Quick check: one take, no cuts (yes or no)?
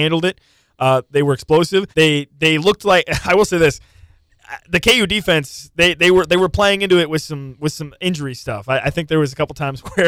no